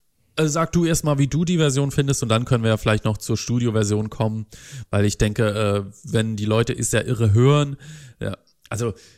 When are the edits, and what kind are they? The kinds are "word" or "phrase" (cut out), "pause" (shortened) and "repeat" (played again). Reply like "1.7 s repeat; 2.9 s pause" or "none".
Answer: none